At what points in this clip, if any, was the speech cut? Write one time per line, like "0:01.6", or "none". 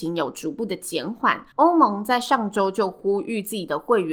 0:01.5